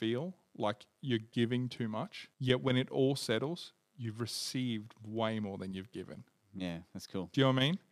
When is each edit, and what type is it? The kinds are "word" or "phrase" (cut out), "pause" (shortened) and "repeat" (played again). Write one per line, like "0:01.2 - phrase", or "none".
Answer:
0:02.3 - pause